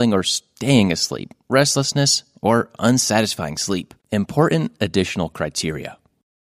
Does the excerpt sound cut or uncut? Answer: cut